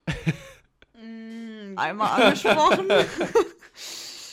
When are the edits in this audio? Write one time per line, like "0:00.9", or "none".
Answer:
0:01.8